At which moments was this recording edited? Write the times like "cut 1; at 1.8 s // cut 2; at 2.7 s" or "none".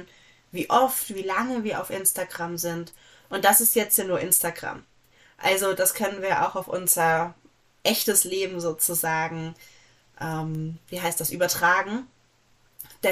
none